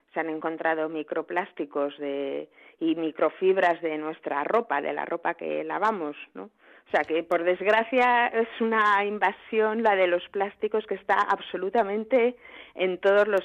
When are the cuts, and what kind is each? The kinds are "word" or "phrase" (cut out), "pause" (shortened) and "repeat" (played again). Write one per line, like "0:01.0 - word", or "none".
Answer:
none